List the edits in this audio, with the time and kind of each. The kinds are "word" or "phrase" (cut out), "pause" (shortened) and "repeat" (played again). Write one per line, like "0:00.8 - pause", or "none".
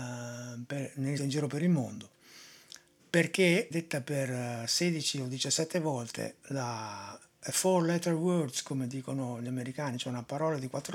0:01.2 - phrase
0:03.7 - word
0:06.4 - pause